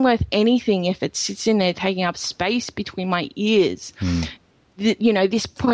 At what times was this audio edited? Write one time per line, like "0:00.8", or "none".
none